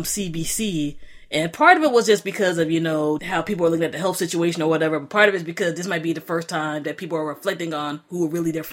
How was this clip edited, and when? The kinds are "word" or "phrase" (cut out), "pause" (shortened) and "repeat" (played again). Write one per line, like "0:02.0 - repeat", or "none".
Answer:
0:03.2 - word